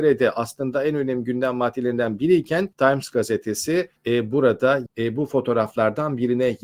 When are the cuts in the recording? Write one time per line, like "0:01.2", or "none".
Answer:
0:02.7
0:04.0
0:04.9